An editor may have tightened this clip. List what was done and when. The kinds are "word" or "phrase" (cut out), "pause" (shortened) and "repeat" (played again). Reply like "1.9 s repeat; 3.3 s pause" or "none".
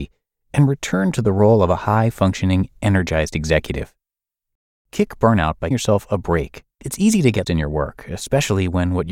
5.7 s word; 6.7 s pause; 7.4 s word

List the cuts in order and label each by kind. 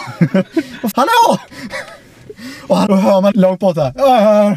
0.9 s word; 2.9 s word; 3.3 s word

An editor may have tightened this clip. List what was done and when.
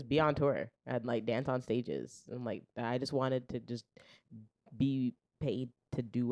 none

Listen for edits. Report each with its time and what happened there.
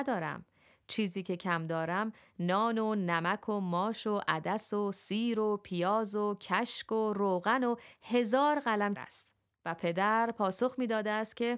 9.0 s phrase

